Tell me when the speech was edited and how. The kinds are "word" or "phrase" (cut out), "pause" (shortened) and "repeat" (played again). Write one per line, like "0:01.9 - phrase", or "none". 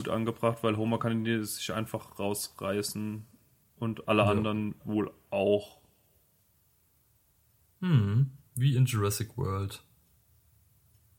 0:04.8 - word